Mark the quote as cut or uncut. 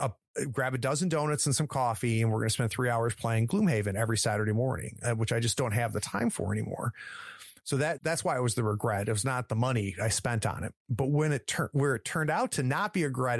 cut